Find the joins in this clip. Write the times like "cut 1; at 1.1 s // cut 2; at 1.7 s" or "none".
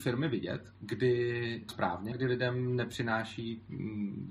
cut 1; at 1.7 s // cut 2; at 2.1 s